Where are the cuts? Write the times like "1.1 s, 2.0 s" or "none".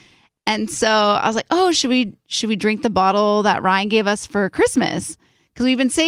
none